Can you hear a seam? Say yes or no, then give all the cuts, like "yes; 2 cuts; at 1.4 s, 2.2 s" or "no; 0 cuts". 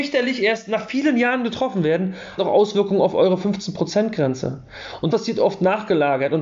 yes; 2 cuts; at 2.4 s, 5.1 s